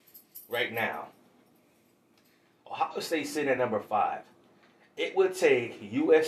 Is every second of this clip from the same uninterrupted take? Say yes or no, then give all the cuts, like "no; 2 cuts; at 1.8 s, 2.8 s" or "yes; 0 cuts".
yes; 0 cuts